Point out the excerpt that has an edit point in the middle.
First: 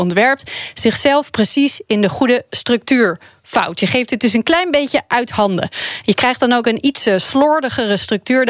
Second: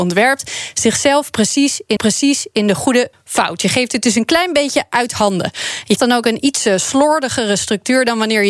second; 3 cuts; at 2.0 s, 3.1 s, 6.0 s

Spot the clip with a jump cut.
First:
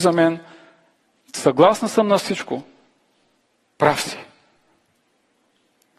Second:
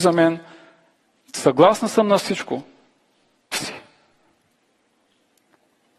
second; 1 cut; at 3.5 s

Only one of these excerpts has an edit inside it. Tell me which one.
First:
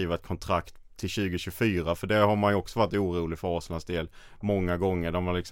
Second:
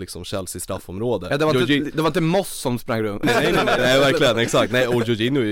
second; 2 cuts; at 3.2 s, 3.8 s

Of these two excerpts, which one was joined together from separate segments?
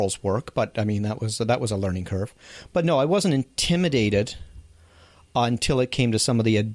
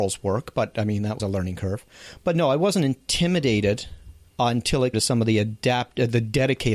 second; 3 cuts; at 1.2 s, 4.3 s, 4.9 s

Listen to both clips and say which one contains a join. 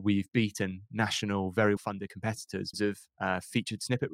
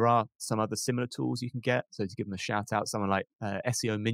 first; 2 cuts; at 1.8 s, 2.7 s

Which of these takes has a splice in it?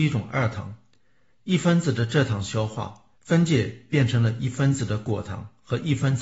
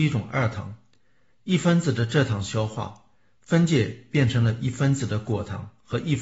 first; 1 cut; at 3.2 s

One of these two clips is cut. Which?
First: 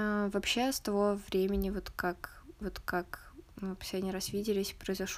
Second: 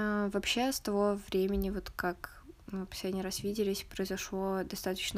first; 1 cut; at 2.6 s

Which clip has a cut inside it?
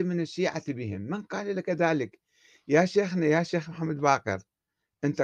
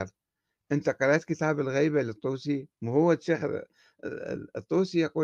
second; 1 cut; at 2.7 s

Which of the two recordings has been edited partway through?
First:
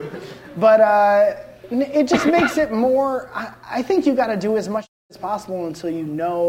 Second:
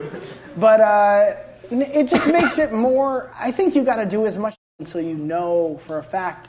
second; 2 cuts; at 3.3 s, 4.8 s

